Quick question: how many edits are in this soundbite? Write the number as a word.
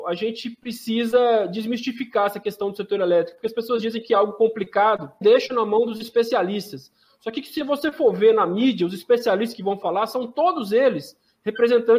one